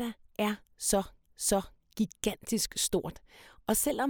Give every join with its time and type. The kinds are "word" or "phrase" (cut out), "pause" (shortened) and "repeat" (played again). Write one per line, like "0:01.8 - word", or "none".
0:01.2 - repeat

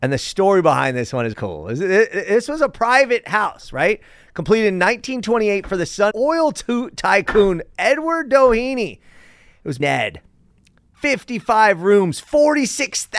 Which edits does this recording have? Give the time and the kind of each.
0:01.3 - word
0:06.1 - phrase
0:09.8 - phrase

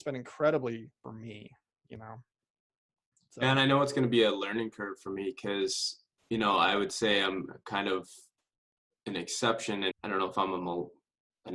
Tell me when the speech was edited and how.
0:01.0 - phrase
0:09.9 - word

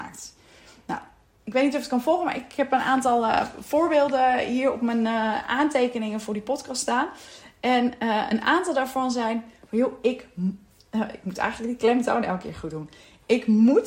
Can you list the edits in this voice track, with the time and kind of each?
none

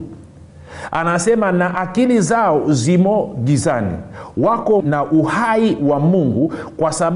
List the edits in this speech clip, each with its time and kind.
0:04.8 - word

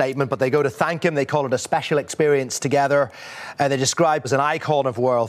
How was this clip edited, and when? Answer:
0:04.2 - word

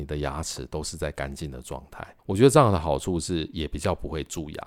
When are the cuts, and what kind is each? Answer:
0:02.2 - pause

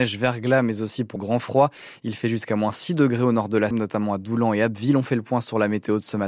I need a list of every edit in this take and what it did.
0:01.2 - word
0:03.7 - word

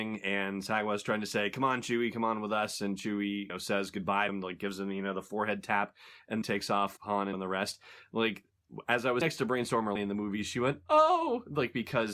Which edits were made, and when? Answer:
0:03.5 - word
0:04.3 - word
0:06.4 - word
0:07.0 - word
0:07.3 - word
0:09.2 - word
0:10.0 - word

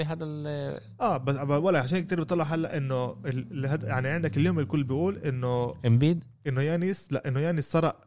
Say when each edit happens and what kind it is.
0:06.4 - pause

